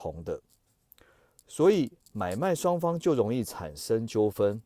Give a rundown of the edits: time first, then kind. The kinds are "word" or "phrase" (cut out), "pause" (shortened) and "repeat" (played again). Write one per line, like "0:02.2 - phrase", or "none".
0:02.0 - pause